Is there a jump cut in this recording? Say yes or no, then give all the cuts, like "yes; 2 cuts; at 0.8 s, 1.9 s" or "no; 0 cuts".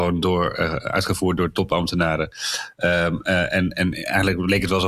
no; 0 cuts